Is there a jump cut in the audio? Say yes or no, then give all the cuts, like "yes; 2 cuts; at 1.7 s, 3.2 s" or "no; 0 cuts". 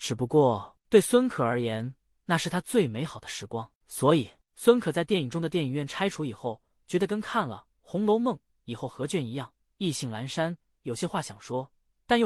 no; 0 cuts